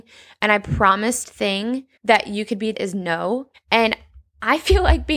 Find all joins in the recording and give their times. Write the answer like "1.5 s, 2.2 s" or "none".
1.2 s, 2.0 s, 2.7 s, 3.5 s